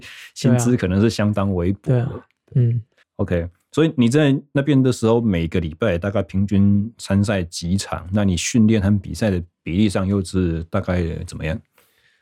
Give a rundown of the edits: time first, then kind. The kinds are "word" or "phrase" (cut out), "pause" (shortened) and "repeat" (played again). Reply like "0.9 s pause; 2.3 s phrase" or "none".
3.0 s pause; 9.5 s pause

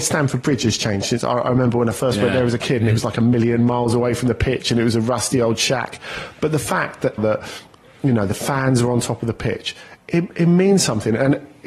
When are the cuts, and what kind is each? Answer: 7.2 s word

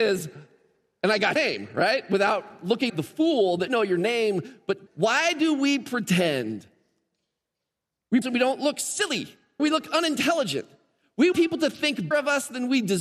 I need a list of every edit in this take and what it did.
1.4 s word; 2.9 s word; 3.7 s word; 4.9 s word; 8.2 s word; 9.6 s word; 11.3 s word; 12.1 s word

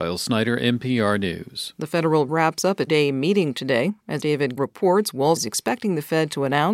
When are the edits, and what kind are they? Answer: 2.3 s word; 2.9 s word; 4.2 s word; 4.6 s word; 5.4 s word

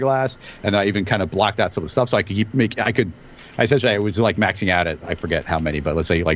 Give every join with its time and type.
none

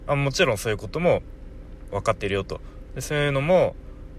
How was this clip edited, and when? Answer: 1.9 s phrase

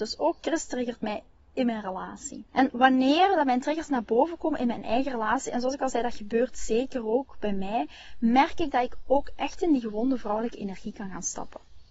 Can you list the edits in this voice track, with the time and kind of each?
2.5 s pause

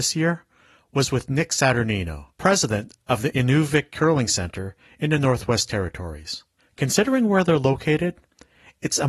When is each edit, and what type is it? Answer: 2.3 s pause; 6.6 s pause

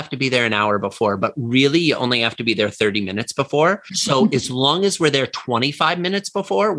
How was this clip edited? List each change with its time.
none

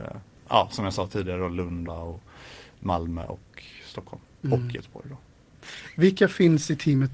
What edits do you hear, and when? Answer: 1.9 s word; 4.3 s pause

